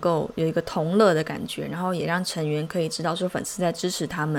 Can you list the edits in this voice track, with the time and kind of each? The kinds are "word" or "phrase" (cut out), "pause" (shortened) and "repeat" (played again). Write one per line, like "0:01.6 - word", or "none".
none